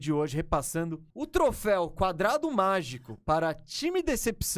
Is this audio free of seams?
no; 1 cut; at 1.1 s

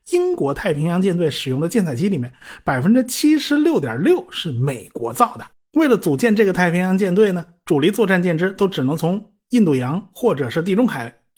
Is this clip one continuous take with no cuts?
no; 1 cut; at 5.5 s

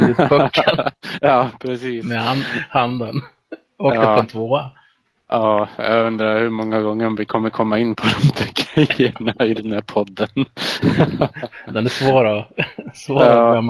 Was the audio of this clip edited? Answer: no; 0 cuts

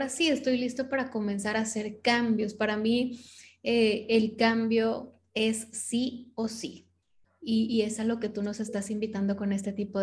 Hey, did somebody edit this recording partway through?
no; 0 cuts

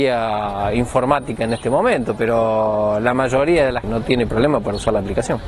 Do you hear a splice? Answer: yes; 1 cut; at 3.8 s

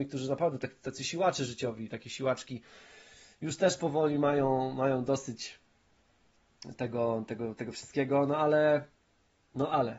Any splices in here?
no; 0 cuts

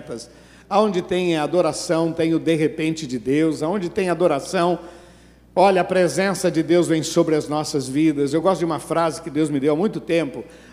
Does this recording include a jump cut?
no; 0 cuts

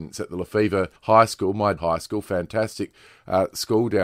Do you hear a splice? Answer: yes; 2 cuts; at 1.0 s, 1.8 s

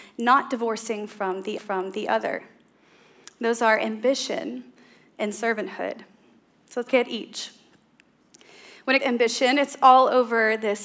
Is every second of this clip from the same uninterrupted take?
no; 3 cuts; at 1.6 s, 6.9 s, 9.0 s

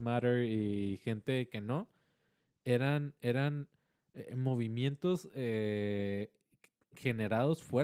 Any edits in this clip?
no; 0 cuts

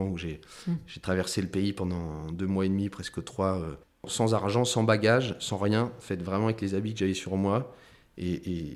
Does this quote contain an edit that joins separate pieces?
no; 0 cuts

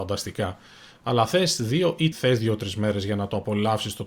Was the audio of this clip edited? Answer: yes; 1 cut; at 2.1 s

